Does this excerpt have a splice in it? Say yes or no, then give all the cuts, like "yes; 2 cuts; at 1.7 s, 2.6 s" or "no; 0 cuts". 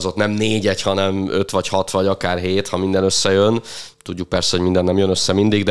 no; 0 cuts